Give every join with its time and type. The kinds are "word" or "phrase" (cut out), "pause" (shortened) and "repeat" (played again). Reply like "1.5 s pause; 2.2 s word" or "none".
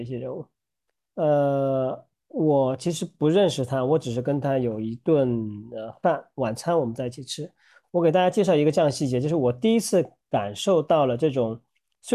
none